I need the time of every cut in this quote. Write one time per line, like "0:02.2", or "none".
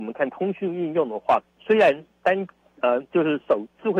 0:01.5

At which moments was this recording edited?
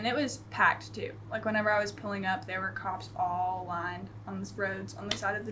none

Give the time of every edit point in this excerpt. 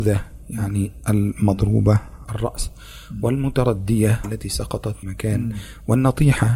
0:02.2
0:04.2
0:05.0

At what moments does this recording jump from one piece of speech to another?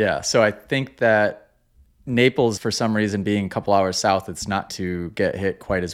0:02.6
0:04.7

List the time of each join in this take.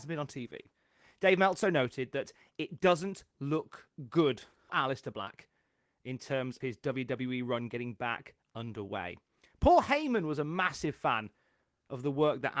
0:01.6
0:04.7
0:06.6

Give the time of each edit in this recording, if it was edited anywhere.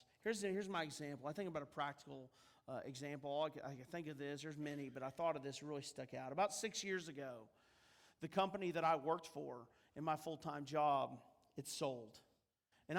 none

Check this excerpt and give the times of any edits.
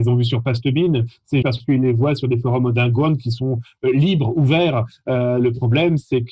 0:01.4

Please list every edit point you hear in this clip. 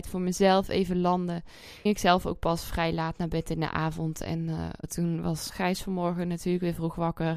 0:01.9
0:04.8
0:05.5

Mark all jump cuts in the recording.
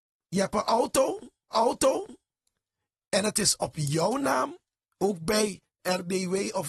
0:01.5
0:04.7
0:05.8

